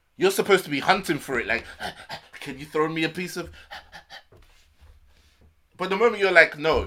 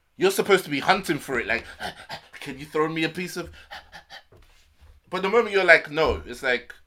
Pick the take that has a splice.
second; 1 cut; at 5.0 s

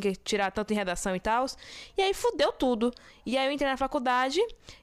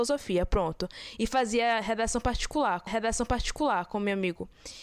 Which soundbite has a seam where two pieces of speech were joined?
second; 1 cut; at 2.9 s

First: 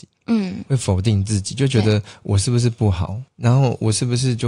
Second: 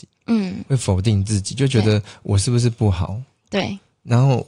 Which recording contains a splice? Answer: first; 1 cut; at 3.3 s

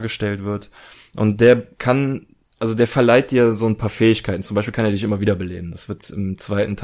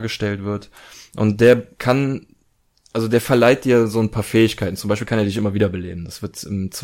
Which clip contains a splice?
first; 1 cut; at 2.4 s

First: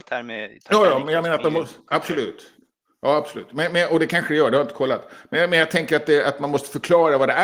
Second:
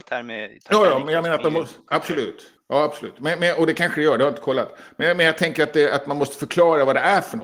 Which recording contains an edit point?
second; 1 cut; at 2.6 s

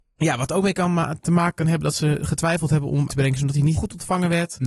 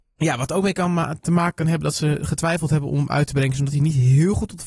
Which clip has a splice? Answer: first; 2 cuts; at 3.1 s, 3.7 s

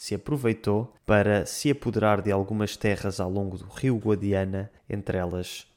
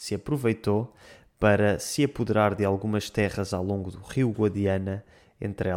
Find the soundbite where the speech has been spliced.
first; 2 cuts; at 1.0 s, 4.8 s

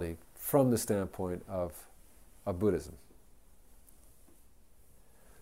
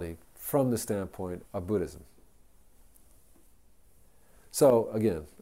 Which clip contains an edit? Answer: second; 1 cut; at 1.4 s

